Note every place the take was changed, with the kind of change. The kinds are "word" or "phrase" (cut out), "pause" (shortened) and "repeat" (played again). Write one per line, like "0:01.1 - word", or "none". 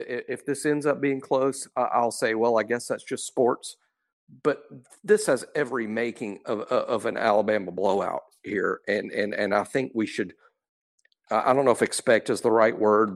none